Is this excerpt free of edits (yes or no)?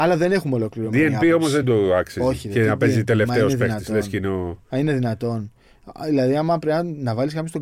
yes